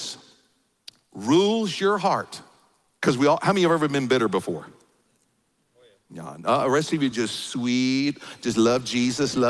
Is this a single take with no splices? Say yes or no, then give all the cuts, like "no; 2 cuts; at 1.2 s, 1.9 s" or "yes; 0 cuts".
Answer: yes; 0 cuts